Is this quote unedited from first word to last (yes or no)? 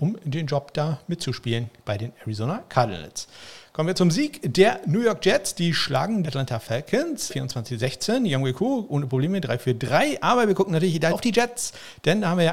no